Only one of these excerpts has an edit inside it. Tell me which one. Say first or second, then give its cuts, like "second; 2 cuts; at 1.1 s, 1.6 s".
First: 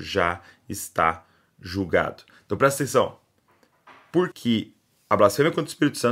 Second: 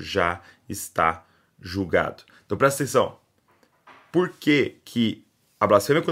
first; 1 cut; at 4.3 s